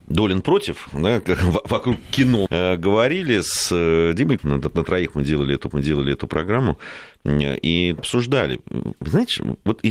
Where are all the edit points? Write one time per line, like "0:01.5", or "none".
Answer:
0:02.5
0:04.4
0:05.7
0:08.0